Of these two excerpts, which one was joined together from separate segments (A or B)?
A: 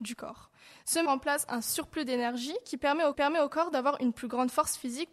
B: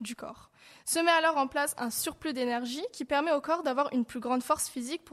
A